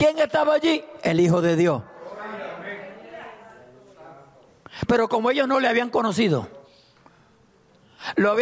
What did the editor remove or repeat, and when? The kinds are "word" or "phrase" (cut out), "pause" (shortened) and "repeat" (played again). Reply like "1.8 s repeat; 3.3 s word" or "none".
none